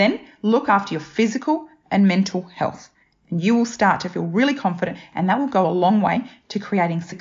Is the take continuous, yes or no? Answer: yes